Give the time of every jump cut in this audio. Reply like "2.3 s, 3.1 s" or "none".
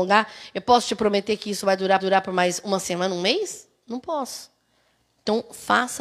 2.0 s